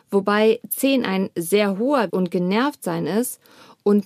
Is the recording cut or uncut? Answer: cut